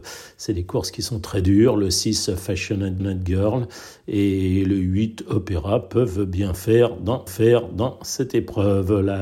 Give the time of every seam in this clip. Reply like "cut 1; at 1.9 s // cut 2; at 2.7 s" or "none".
cut 1; at 3.0 s // cut 2; at 7.3 s